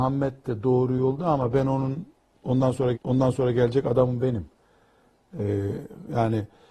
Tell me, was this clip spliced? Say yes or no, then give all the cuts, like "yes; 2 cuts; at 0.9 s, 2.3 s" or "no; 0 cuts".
yes; 1 cut; at 2.9 s